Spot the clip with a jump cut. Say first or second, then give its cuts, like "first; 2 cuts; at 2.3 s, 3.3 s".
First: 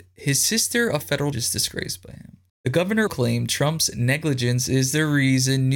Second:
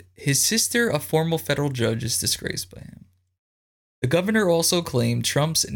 first; 4 cuts; at 1.0 s, 1.3 s, 2.5 s, 3.1 s